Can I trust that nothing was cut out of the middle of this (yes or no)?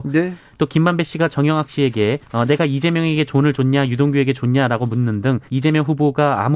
no